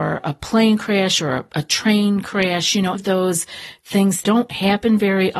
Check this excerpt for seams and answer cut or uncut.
cut